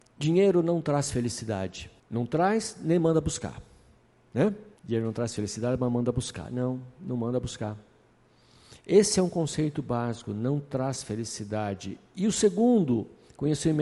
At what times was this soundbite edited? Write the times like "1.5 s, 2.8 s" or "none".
2.0 s, 4.8 s